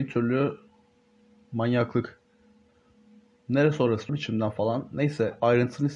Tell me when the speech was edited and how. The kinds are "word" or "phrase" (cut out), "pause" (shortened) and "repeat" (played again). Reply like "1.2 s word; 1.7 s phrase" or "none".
4.1 s word

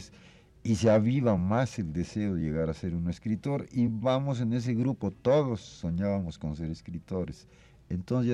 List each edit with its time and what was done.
none

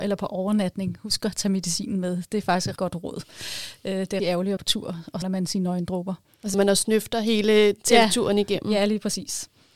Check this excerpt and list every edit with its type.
2.8 s word; 4.2 s word; 4.6 s word; 5.2 s word; 6.5 s word

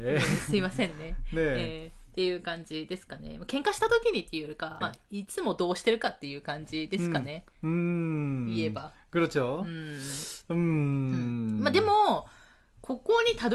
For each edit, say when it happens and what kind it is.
4.8 s word

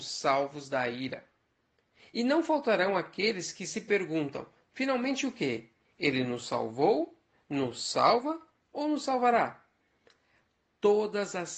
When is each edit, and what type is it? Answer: none

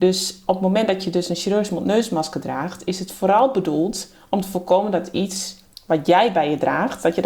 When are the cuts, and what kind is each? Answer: 5.7 s pause

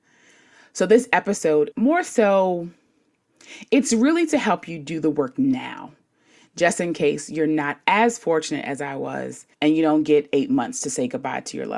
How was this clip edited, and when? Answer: 1.7 s word; 9.5 s pause

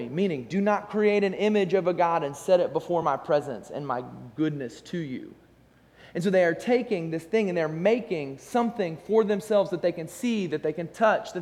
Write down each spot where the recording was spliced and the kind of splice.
none

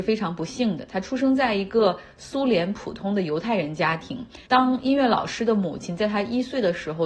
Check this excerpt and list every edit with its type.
4.4 s pause

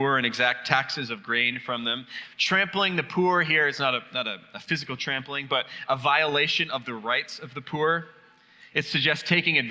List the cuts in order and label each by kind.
none

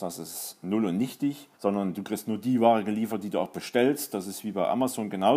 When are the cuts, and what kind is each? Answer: 1.5 s pause

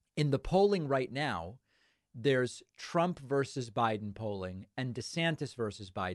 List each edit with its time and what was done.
none

